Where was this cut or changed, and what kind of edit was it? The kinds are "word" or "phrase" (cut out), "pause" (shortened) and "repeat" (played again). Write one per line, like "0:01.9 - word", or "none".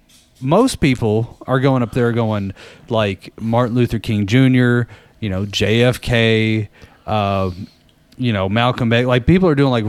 none

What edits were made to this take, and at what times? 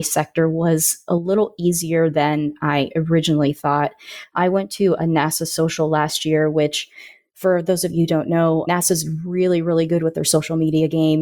none

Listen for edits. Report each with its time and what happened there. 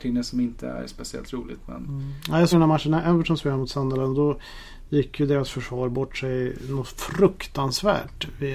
0:02.5 - word

